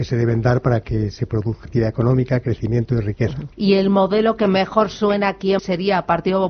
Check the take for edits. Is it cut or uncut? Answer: cut